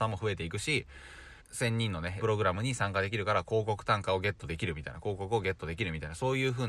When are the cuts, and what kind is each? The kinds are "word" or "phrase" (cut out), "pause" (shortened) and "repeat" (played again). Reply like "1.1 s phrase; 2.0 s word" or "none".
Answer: 1.4 s phrase; 2.2 s word